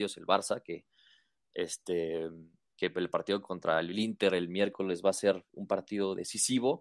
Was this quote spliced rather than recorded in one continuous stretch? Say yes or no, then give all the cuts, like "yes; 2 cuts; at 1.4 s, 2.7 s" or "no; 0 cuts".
no; 0 cuts